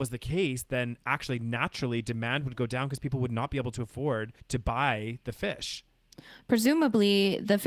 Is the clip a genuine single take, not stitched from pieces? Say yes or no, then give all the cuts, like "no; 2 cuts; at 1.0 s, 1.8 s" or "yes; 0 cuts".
no; 1 cut; at 4.4 s